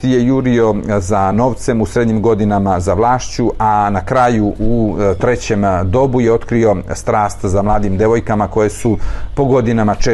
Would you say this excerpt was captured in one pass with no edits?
yes; 0 cuts

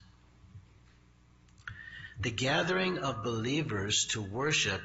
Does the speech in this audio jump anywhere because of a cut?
no; 0 cuts

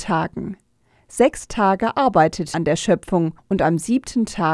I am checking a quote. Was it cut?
yes; 2 cuts; at 2.5 s, 3.4 s

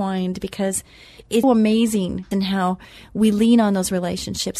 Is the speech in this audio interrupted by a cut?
yes; 2 cuts; at 1.4 s, 2.3 s

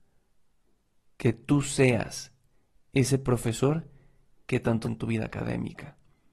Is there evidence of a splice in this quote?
yes; 1 cut; at 4.8 s

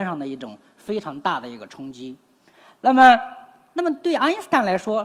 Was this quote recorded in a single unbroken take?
yes; 0 cuts

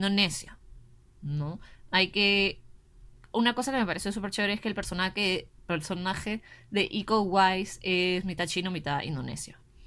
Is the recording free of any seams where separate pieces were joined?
yes; 0 cuts

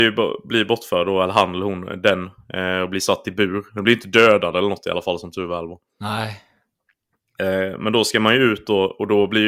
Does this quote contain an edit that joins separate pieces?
no; 0 cuts

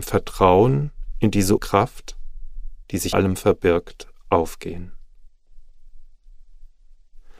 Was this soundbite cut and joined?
yes; 2 cuts; at 1.6 s, 3.1 s

